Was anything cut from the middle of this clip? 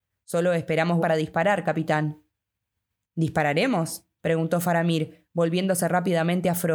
yes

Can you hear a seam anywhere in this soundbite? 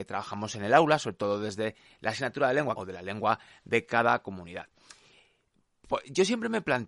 yes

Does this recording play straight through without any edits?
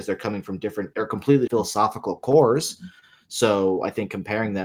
no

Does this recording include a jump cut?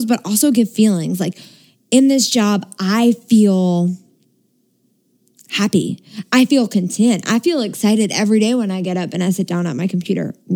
no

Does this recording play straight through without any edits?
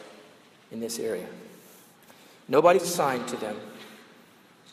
no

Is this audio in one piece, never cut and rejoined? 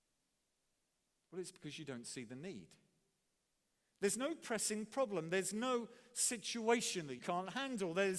no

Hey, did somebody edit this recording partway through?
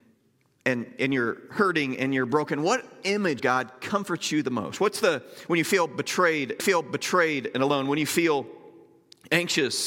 yes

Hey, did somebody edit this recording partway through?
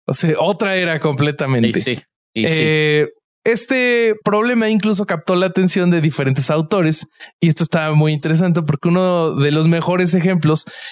yes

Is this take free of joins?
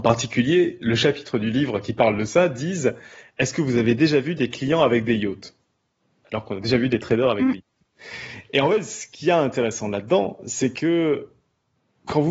yes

